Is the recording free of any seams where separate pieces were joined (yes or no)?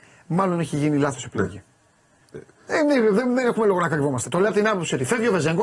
yes